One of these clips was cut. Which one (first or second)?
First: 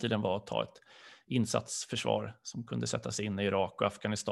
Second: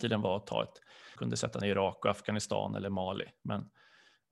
second